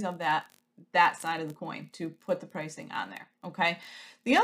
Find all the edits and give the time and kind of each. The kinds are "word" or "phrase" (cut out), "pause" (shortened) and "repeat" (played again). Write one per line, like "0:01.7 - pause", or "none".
none